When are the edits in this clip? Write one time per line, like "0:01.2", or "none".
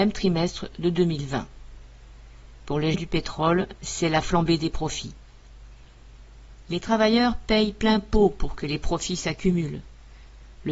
0:02.9